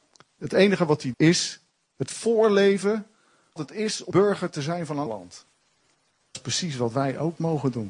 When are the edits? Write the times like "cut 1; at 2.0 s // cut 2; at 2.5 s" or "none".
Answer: cut 1; at 1.1 s // cut 2; at 3.6 s // cut 3; at 4.1 s // cut 4; at 5.1 s // cut 5; at 6.3 s